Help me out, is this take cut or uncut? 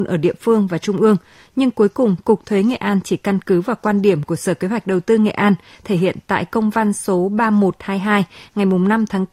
uncut